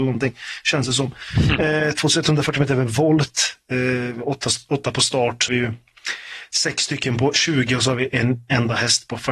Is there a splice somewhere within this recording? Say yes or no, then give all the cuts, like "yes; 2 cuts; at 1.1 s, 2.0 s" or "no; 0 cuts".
yes; 1 cut; at 5.5 s